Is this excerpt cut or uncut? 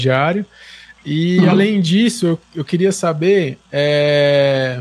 uncut